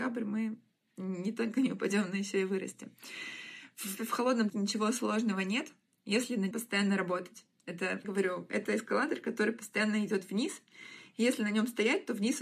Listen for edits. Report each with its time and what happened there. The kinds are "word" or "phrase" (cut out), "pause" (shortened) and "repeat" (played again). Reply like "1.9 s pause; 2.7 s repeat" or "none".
4.0 s word; 4.5 s word; 6.5 s word; 8.0 s word